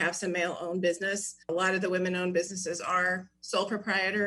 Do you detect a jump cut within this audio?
yes; 1 cut; at 1.4 s

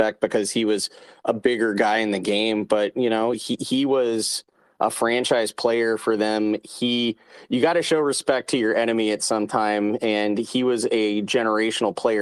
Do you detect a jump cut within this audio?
no; 0 cuts

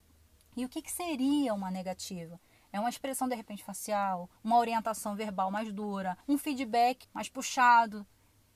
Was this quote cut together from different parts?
yes; 3 cuts; at 4.4 s, 6.2 s, 7.0 s

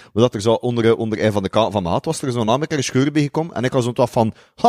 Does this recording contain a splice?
no; 0 cuts

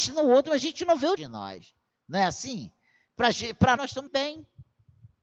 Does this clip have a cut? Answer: yes; 3 cuts; at 1.2 s, 3.8 s, 4.1 s

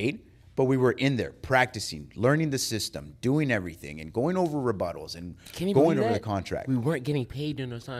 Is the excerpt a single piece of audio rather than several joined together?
yes; 0 cuts

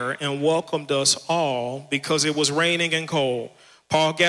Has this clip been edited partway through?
no; 0 cuts

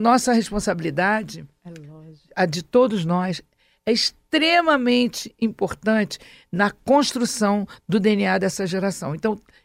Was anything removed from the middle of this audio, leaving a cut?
no; 0 cuts

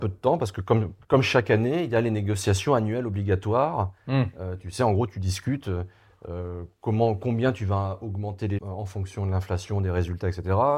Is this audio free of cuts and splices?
no; 2 cuts; at 1.0 s, 8.6 s

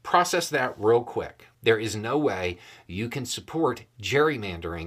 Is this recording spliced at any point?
yes; 1 cut; at 1.5 s

